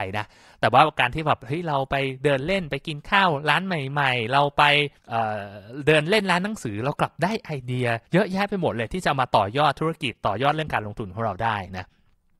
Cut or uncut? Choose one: cut